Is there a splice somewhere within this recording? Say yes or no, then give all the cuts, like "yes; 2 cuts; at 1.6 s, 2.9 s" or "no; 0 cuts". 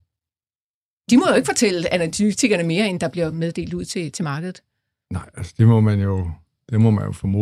no; 0 cuts